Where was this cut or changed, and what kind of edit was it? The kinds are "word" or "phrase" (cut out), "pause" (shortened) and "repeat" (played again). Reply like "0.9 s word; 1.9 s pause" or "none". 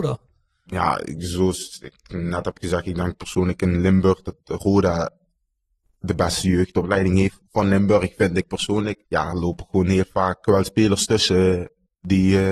none